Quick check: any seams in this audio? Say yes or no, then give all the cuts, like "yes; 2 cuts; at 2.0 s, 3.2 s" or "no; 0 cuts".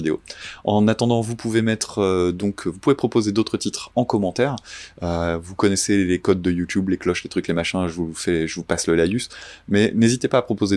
no; 0 cuts